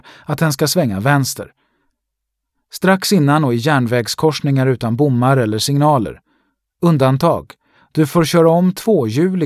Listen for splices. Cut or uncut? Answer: uncut